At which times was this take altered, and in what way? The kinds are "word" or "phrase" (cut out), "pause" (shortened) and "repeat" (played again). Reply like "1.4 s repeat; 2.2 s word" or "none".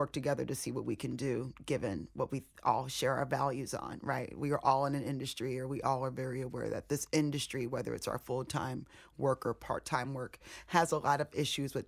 none